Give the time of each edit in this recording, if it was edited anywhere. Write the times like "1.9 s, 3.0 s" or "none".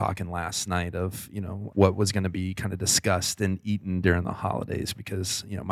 1.7 s